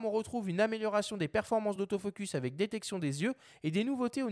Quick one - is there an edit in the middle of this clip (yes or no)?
no